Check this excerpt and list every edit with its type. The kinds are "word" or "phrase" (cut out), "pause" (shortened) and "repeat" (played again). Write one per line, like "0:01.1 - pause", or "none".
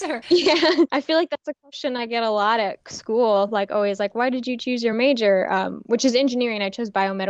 none